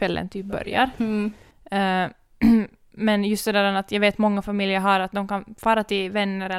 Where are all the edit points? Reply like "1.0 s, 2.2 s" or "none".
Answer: none

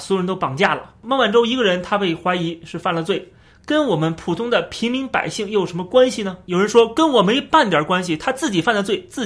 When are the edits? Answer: none

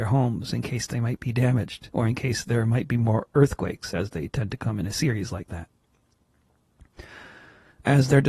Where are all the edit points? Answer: none

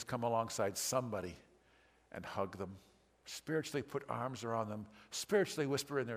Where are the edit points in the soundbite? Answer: none

